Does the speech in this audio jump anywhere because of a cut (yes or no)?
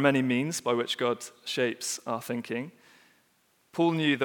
no